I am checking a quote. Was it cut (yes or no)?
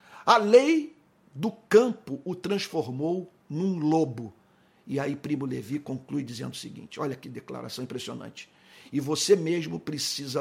no